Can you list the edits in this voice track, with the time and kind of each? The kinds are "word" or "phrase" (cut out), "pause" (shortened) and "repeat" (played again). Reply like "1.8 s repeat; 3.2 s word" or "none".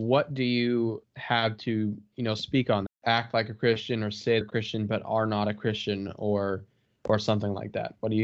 1.0 s word; 2.9 s phrase; 4.4 s word